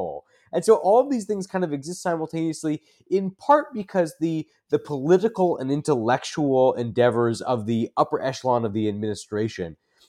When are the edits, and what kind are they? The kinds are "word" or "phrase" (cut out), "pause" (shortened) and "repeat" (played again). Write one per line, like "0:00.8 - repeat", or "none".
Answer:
none